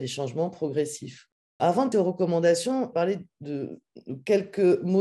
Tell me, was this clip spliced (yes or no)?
yes